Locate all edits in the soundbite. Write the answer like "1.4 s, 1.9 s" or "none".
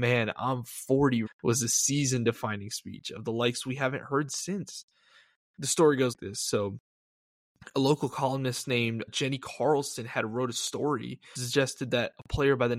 1.3 s, 6.1 s, 9.1 s, 11.4 s